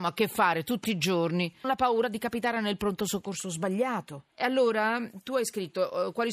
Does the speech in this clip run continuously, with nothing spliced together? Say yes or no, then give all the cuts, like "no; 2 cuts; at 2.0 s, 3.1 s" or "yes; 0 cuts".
no; 2 cuts; at 1.6 s, 4.3 s